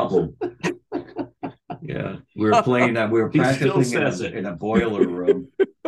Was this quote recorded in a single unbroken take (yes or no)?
yes